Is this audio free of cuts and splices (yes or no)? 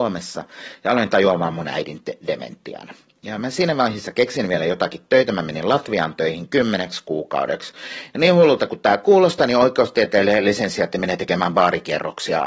yes